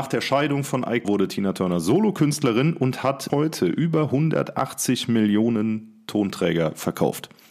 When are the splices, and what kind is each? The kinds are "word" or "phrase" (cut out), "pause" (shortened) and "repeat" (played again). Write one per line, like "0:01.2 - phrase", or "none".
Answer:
0:01.0 - word
0:03.3 - word